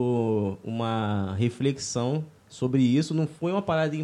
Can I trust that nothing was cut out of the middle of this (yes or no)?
no